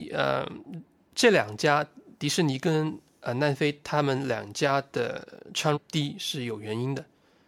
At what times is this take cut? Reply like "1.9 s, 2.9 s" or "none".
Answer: 5.7 s